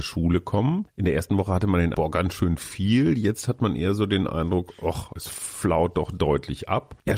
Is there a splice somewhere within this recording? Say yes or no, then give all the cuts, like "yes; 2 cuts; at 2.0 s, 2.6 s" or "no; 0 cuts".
yes; 2 cuts; at 1.9 s, 5.2 s